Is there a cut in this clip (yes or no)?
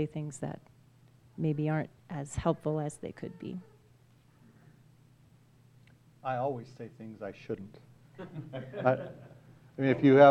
no